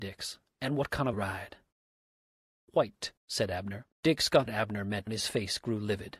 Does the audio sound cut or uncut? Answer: cut